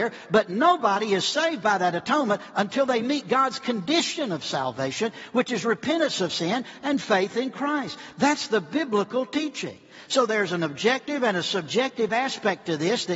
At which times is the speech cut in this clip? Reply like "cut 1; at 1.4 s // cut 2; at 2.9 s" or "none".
none

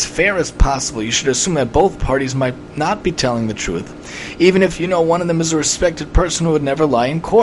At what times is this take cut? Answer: none

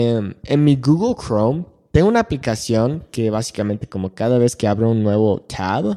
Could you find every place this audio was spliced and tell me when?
none

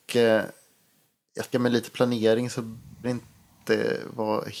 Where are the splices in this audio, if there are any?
cut 1; at 1.5 s // cut 2; at 3.0 s

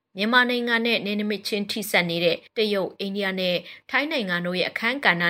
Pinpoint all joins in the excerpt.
cut 1; at 2.5 s

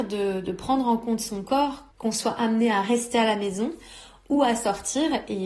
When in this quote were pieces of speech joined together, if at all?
cut 1; at 1.9 s

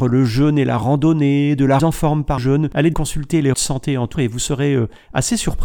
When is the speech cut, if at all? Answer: cut 1; at 1.8 s // cut 2; at 2.4 s // cut 3; at 2.9 s // cut 4; at 3.5 s // cut 5; at 4.1 s

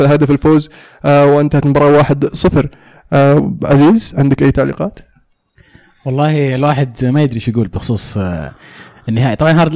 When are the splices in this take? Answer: none

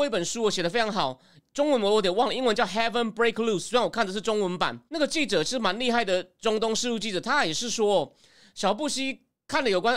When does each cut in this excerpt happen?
cut 1; at 4.9 s

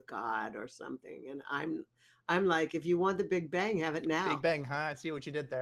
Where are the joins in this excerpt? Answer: none

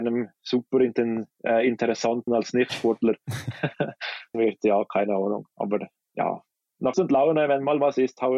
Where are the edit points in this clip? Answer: cut 1; at 2.3 s // cut 2; at 4.3 s // cut 3; at 6.9 s

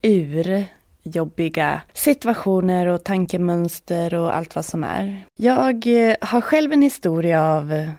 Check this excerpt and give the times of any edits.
cut 1; at 1.9 s // cut 2; at 5.3 s

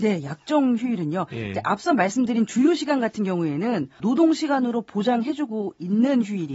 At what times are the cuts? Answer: cut 1; at 4.0 s

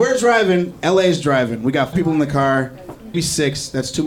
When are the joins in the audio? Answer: cut 1; at 1.9 s // cut 2; at 3.1 s

